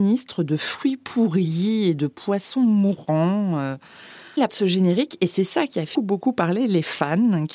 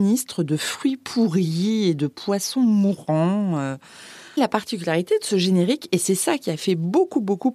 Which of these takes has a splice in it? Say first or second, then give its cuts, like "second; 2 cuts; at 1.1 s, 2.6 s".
first; 2 cuts; at 4.5 s, 5.9 s